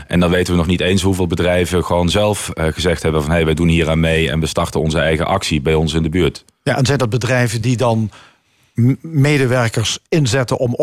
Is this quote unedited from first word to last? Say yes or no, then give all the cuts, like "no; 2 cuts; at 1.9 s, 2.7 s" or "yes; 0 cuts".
yes; 0 cuts